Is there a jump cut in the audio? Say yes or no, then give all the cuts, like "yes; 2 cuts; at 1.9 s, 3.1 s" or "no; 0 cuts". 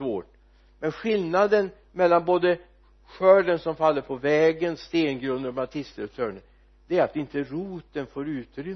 no; 0 cuts